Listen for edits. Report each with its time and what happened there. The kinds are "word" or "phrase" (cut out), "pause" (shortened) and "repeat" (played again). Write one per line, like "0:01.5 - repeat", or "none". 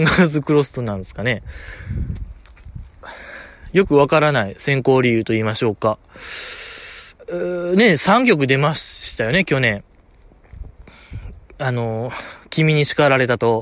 none